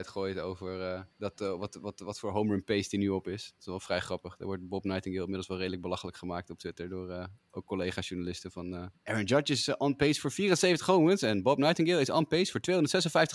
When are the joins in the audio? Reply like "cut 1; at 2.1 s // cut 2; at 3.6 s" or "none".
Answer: cut 1; at 1.1 s // cut 2; at 8.9 s